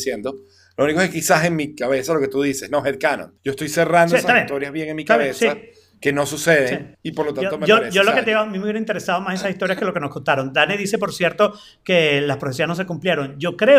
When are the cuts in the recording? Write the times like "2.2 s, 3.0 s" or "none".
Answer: 3.4 s, 6.9 s